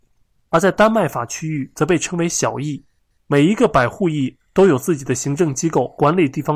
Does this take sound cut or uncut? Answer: uncut